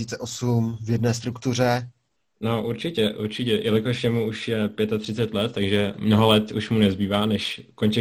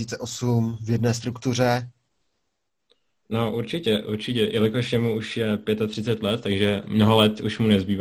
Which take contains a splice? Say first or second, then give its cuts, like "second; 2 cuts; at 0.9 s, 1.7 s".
first; 1 cut; at 2.2 s